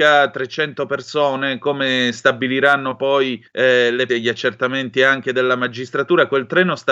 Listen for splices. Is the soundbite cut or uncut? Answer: cut